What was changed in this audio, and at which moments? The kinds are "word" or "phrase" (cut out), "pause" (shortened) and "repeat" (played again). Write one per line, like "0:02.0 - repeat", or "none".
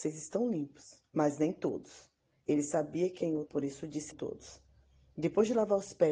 0:03.5 - word
0:04.1 - word